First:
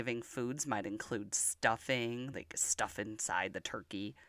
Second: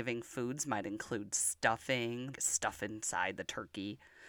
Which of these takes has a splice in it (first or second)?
second